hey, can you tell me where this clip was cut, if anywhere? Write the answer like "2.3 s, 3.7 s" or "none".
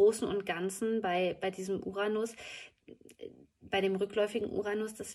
none